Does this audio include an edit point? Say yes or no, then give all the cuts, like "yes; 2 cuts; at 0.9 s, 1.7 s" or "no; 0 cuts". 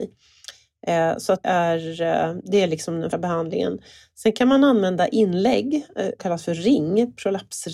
yes; 3 cuts; at 1.4 s, 3.1 s, 6.2 s